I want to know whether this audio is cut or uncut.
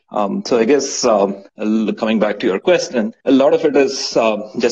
cut